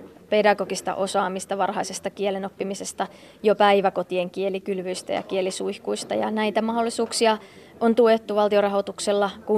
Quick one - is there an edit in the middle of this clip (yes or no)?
no